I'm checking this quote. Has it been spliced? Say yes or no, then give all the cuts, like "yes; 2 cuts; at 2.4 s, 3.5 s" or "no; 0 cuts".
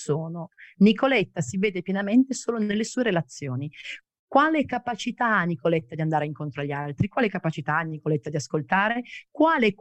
no; 0 cuts